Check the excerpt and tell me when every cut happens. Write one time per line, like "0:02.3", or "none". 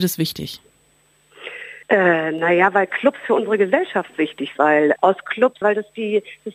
0:01.8
0:04.6
0:05.0
0:05.6